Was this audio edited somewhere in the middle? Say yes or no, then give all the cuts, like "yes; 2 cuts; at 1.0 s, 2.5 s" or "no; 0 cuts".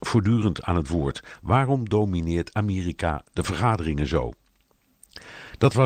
no; 0 cuts